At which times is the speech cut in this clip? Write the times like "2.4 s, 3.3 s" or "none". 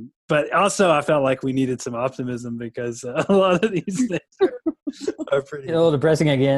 none